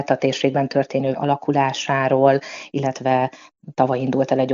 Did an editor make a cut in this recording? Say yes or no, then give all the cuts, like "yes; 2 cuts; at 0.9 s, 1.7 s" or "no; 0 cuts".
yes; 1 cut; at 1.1 s